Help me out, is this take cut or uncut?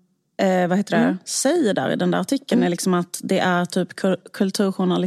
uncut